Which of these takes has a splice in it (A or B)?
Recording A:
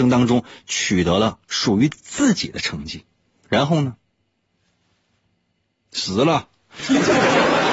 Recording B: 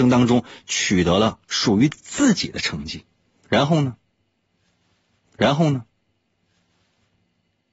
B